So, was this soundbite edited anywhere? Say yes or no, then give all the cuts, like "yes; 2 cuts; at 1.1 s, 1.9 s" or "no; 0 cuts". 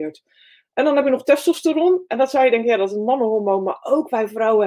no; 0 cuts